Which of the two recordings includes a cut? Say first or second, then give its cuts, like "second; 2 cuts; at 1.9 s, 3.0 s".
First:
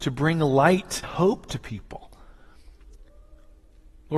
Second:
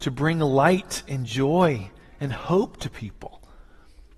first; 1 cut; at 1.0 s